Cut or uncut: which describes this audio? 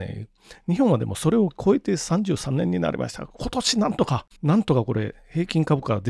cut